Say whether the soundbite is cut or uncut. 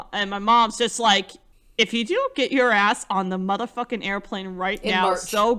cut